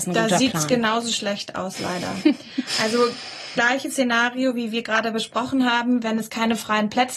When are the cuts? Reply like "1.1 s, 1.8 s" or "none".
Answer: 3.6 s

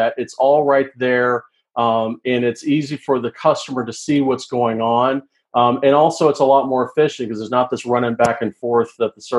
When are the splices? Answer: none

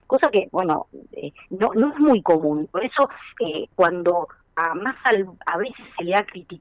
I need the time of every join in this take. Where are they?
none

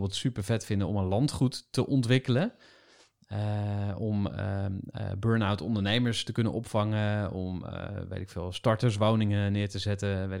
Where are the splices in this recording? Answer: none

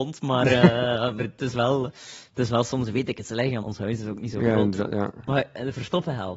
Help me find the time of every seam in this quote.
1.2 s, 3.6 s

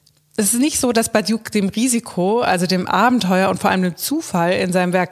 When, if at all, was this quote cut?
none

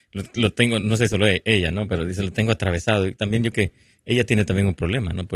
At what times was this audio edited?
1.1 s, 3.5 s

